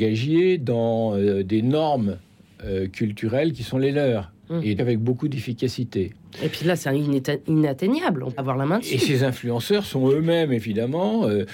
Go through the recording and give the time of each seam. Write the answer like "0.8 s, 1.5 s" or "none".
4.8 s, 8.4 s